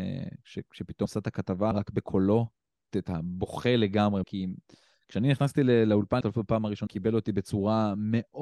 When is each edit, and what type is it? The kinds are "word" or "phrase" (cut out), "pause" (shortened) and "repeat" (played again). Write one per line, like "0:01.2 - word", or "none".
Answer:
0:01.1 - word
0:01.7 - word
0:02.9 - word
0:04.2 - word
0:06.2 - word
0:06.9 - word

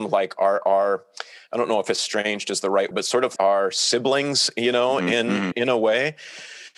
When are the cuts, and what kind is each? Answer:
0:02.9 - word
0:03.4 - word
0:05.5 - word

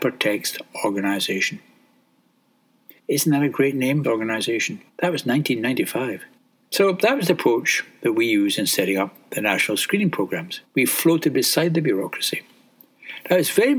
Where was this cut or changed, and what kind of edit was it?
0:03.0 - pause
0:04.0 - word
0:04.9 - pause
0:06.4 - pause
0:10.6 - pause

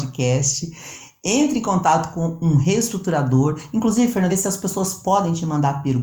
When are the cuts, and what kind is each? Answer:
0:04.3 - phrase

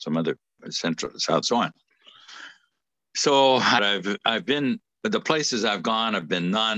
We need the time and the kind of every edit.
0:01.4 - phrase
0:03.8 - phrase

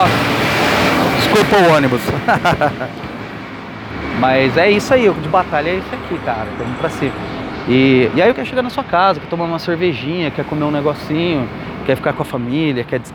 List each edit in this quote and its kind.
0:05.1 - word
0:08.3 - word

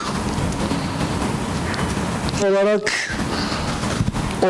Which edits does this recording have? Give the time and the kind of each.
0:02.4 - word

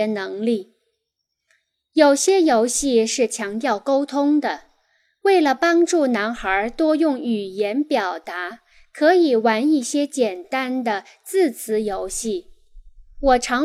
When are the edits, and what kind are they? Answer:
none

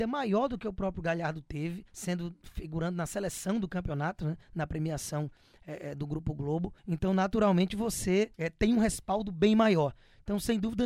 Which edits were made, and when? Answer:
0:01.9 - pause
0:04.4 - pause
0:06.8 - pause
0:08.3 - pause

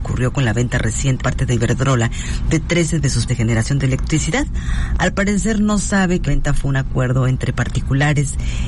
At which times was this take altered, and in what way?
0:01.2 - word
0:03.3 - word
0:06.3 - word

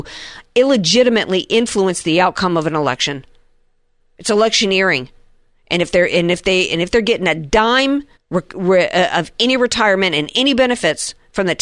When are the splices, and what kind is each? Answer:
0:08.2 - pause

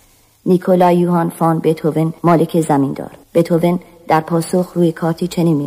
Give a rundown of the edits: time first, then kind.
0:02.2 - pause
0:03.2 - pause

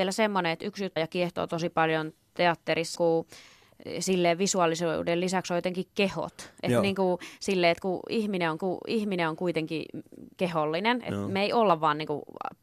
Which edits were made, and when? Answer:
0:01.0 - phrase
0:03.0 - word
0:08.6 - repeat

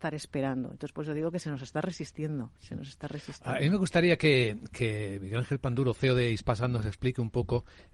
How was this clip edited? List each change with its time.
0:02.6 - pause

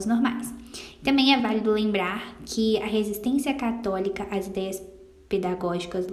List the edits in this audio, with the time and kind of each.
none

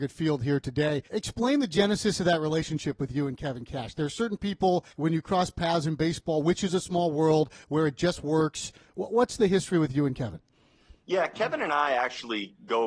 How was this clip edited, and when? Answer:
0:01.1 - pause
0:04.9 - pause

